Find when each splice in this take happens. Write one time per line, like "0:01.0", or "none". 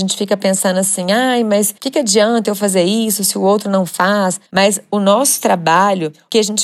0:01.8
0:04.5